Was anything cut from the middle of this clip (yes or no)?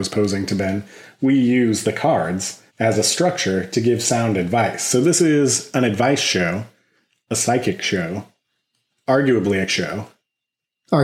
yes